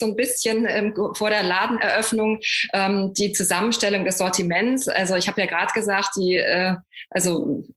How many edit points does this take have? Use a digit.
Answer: 0